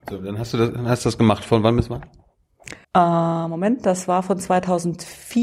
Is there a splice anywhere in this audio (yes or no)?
yes